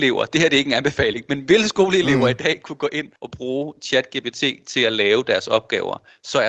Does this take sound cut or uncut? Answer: cut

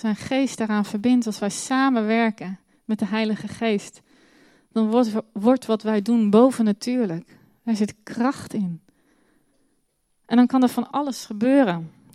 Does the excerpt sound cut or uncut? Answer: uncut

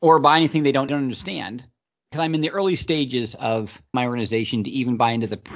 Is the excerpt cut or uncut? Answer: cut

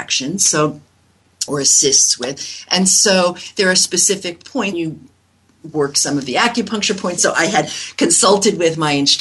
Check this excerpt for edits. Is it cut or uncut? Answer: cut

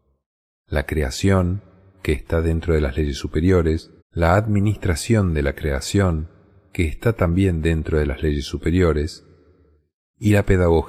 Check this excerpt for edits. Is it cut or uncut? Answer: cut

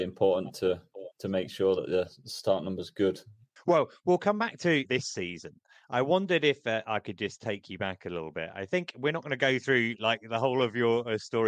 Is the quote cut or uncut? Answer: uncut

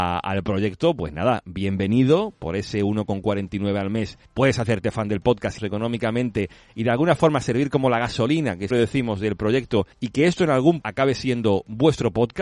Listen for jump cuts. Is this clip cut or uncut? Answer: cut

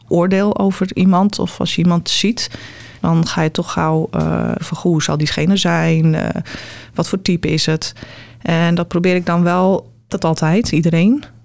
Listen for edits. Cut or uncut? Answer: cut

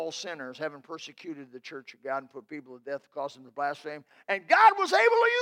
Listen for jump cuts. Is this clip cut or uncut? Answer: uncut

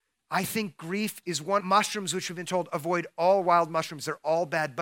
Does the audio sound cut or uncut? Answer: cut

